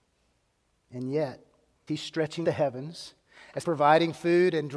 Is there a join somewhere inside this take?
yes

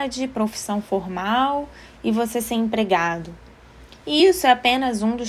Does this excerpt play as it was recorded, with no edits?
yes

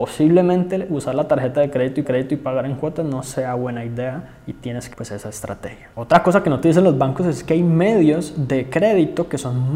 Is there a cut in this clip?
yes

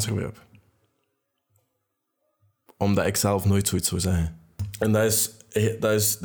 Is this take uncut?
yes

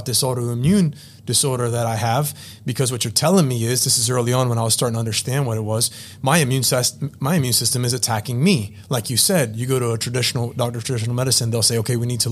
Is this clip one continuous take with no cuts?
yes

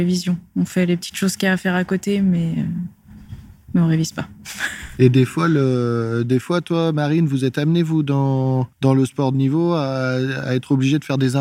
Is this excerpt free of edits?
no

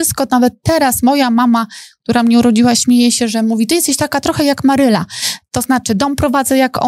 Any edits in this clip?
no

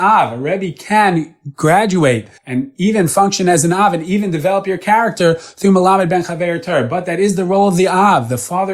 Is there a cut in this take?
yes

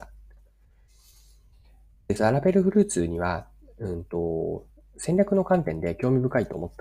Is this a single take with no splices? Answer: yes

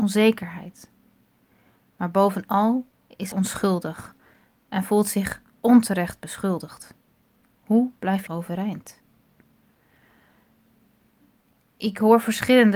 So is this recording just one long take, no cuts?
no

